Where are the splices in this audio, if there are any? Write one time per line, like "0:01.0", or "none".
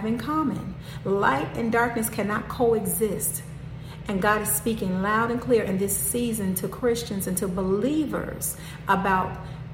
none